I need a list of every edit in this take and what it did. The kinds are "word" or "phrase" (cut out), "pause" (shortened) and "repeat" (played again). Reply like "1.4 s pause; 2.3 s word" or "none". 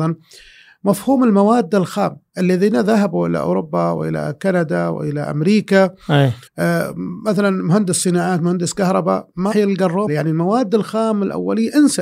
6.5 s pause; 9.5 s word; 10.1 s word